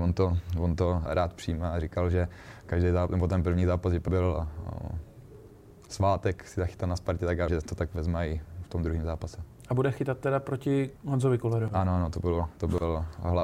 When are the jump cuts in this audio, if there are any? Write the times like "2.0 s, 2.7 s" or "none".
1.1 s, 4.1 s, 7.5 s, 11.0 s

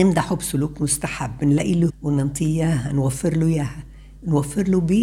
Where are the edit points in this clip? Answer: 1.9 s

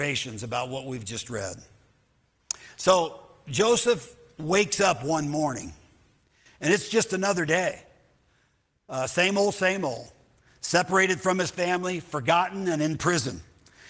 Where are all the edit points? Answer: none

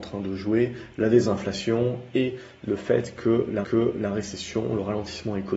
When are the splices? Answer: 3.6 s

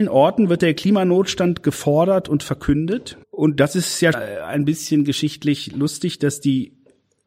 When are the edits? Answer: 3.2 s, 4.1 s

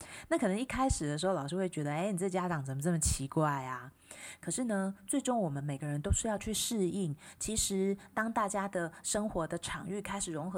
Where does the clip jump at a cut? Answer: none

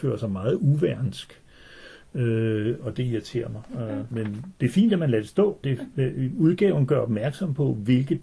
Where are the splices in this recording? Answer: 4.1 s, 5.6 s

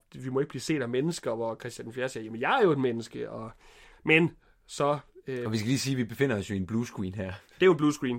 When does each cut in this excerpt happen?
none

